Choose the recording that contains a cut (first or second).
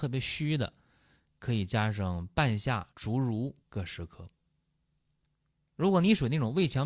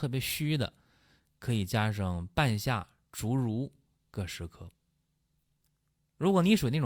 first